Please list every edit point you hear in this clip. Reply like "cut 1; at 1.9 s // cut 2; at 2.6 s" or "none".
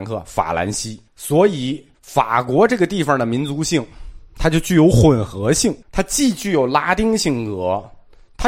cut 1; at 1.1 s // cut 2; at 1.9 s // cut 3; at 5.8 s